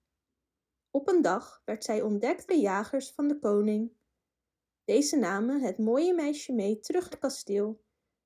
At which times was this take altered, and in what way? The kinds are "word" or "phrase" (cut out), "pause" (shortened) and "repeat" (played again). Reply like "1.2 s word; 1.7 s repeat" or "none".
2.5 s word; 7.1 s word